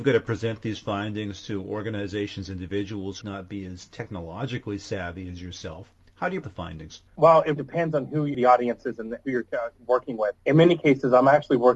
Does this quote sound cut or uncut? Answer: cut